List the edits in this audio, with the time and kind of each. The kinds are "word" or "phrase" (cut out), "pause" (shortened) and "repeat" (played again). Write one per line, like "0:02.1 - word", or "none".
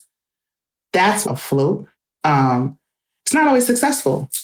0:01.2 - phrase
0:01.9 - pause

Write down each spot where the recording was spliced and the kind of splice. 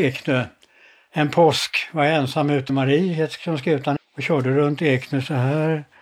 0:02.7 - phrase
0:04.0 - word

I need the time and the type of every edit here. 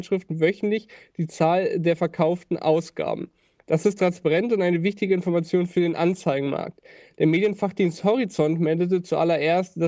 none

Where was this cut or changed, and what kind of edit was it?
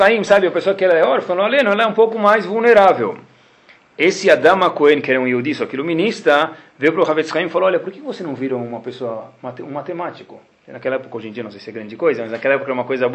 none

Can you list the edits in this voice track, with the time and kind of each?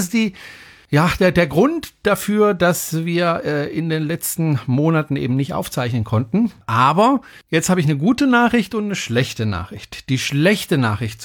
none

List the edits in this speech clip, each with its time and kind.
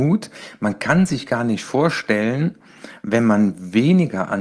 none

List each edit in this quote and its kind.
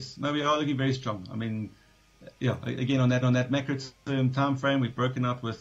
0:03.2 - repeat

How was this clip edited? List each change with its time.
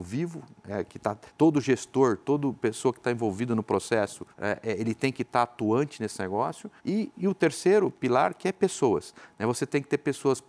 0:01.3 - pause
0:04.3 - pause
0:06.8 - pause

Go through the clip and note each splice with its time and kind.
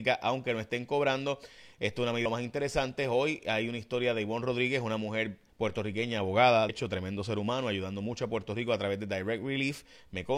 0:02.3 - word
0:05.5 - pause
0:06.7 - word

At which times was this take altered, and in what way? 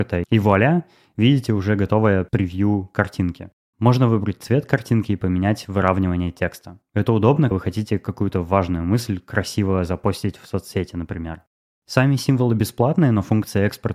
0:07.5 - word

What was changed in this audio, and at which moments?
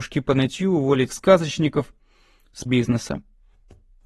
0:01.1 - word
0:02.7 - phrase

